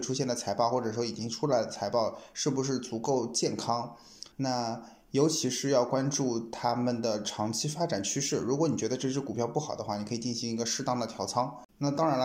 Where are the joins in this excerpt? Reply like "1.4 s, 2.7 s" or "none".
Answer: 4.3 s